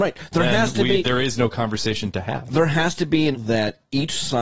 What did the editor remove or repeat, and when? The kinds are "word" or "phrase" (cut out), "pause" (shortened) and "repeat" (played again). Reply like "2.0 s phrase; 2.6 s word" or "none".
3.3 s word